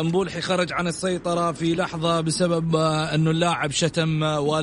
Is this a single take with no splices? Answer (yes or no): yes